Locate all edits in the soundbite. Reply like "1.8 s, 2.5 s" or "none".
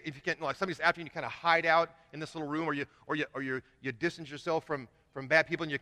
none